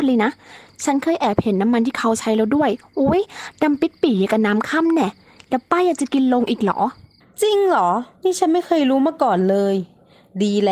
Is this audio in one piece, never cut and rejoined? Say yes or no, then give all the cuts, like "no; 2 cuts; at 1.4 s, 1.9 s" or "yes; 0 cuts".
no; 2 cuts; at 7.2 s, 8.2 s